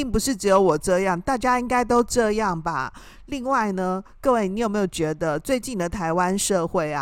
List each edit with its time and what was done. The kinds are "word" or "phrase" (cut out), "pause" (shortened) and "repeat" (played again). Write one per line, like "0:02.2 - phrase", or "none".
none